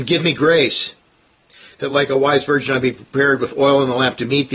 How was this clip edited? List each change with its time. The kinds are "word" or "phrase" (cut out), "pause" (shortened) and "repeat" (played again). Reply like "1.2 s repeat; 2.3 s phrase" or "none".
none

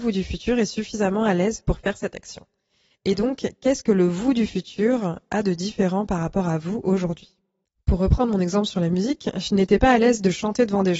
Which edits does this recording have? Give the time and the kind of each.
none

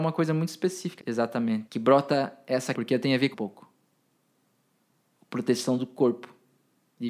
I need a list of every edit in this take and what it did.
1.0 s word; 1.7 s word; 2.7 s word; 3.3 s phrase

